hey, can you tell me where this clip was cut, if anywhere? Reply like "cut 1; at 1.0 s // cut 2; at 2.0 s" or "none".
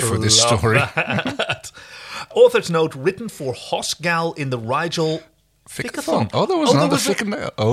none